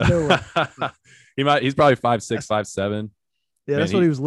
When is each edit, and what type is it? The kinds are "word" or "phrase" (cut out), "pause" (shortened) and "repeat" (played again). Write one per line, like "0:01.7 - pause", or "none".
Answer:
none